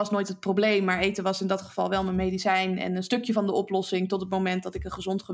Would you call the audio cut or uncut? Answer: uncut